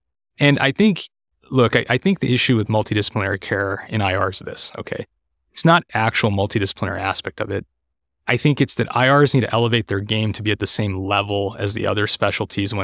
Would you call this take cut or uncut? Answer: cut